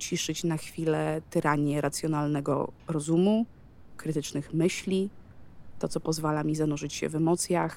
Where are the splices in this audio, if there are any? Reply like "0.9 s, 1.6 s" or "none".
2.8 s